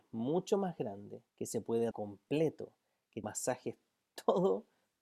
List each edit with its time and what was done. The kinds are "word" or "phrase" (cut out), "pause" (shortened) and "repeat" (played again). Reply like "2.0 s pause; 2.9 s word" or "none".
1.3 s pause; 1.9 s word; 3.2 s phrase